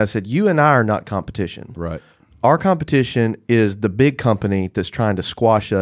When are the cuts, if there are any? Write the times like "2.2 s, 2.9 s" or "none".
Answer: none